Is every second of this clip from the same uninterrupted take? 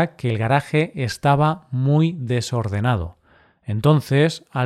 yes; 0 cuts

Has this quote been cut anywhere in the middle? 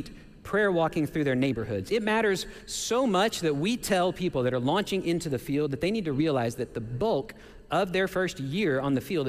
no; 0 cuts

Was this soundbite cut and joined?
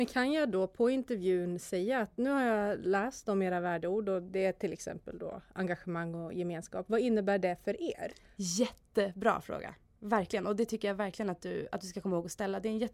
no; 0 cuts

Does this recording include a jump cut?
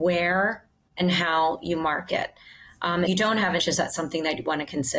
yes; 2 cuts; at 3.1 s, 3.6 s

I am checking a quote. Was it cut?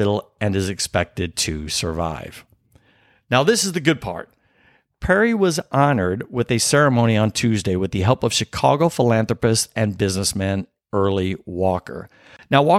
no; 0 cuts

